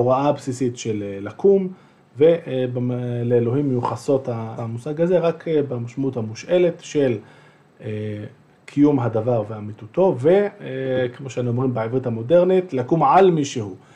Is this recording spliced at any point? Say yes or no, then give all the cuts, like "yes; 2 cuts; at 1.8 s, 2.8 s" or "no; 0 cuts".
yes; 1 cut; at 4.6 s